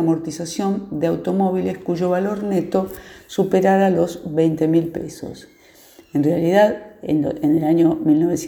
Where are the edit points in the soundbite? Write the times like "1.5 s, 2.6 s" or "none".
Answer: none